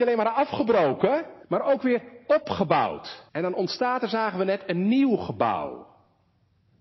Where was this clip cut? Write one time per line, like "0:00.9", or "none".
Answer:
0:01.4
0:03.3